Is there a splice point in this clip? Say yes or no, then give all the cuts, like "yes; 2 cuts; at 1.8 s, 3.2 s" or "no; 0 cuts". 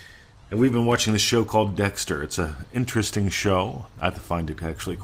no; 0 cuts